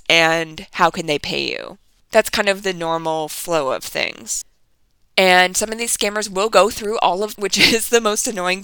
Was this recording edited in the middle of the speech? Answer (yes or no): yes